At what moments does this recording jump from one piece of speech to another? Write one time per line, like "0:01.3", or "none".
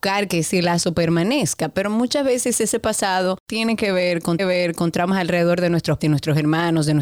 0:04.4
0:06.0